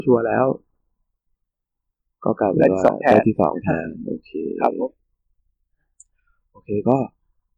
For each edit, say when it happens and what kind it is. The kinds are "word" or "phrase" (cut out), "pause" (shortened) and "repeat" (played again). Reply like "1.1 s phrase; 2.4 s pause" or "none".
none